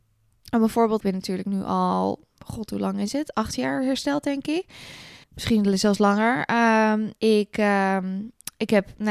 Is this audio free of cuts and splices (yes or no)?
no